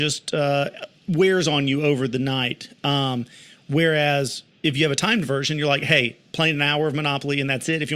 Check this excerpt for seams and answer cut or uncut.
uncut